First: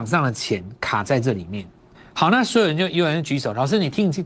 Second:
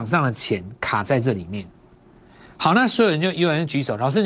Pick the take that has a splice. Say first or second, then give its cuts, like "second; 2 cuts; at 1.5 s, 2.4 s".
first; 1 cut; at 1.9 s